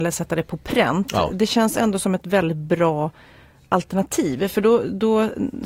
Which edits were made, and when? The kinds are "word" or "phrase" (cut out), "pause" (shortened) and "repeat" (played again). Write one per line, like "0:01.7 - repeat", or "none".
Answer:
none